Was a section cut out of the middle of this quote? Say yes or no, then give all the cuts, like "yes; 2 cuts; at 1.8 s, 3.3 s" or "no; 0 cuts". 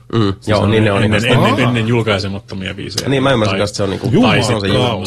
yes; 1 cut; at 1.6 s